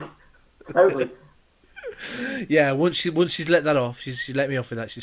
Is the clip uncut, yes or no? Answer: yes